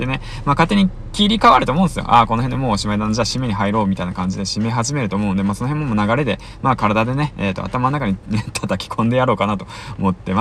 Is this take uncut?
yes; 0 cuts

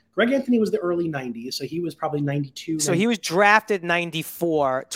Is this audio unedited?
yes; 0 cuts

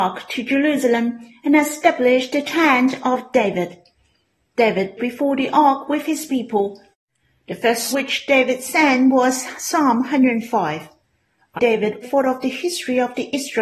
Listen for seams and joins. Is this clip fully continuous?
no; 4 cuts; at 5.0 s, 7.9 s, 11.6 s, 12.0 s

